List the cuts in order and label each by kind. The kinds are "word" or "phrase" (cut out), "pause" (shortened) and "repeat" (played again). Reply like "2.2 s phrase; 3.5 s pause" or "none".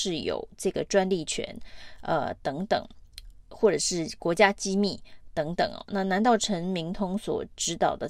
none